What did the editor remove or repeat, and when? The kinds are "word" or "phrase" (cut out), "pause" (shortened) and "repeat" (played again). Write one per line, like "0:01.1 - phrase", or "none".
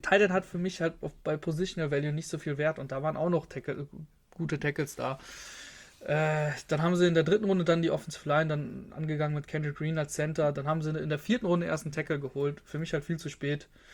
none